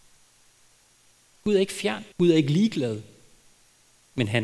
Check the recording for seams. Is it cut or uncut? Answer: cut